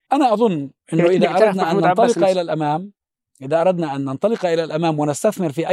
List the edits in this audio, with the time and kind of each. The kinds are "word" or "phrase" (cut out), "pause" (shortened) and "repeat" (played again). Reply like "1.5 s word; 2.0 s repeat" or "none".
none